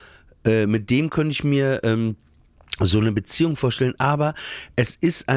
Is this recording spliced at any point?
no; 0 cuts

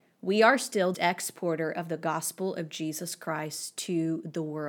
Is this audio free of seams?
no; 1 cut; at 0.9 s

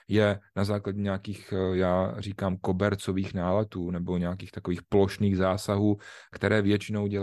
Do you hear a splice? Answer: no; 0 cuts

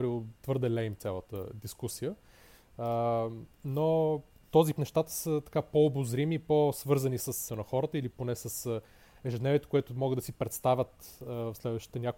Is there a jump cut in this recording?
yes; 3 cuts; at 4.4 s, 4.7 s, 7.5 s

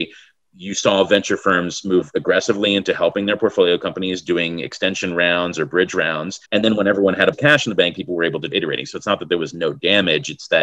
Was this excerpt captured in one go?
no; 3 cuts; at 6.4 s, 7.3 s, 8.5 s

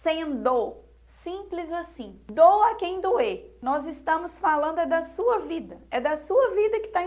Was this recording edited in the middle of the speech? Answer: no; 0 cuts

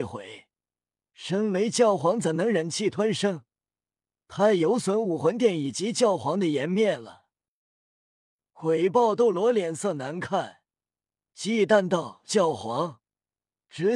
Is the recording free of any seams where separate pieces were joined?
yes; 0 cuts

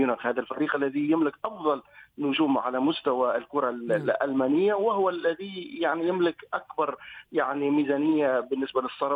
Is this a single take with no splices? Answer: yes; 0 cuts

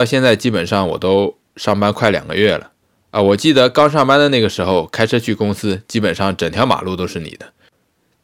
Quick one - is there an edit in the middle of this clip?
yes; 1 cut; at 2.8 s

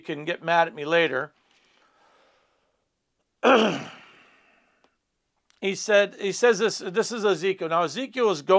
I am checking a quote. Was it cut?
no; 0 cuts

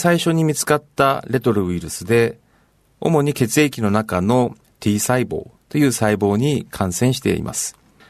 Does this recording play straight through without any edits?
yes; 0 cuts

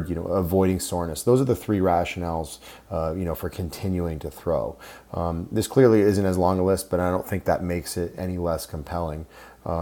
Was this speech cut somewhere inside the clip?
no; 0 cuts

